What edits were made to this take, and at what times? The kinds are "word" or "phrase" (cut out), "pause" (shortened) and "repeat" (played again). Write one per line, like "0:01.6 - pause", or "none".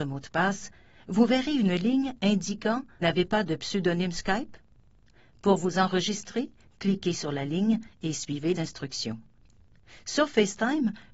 0:03.0 - word
0:08.6 - word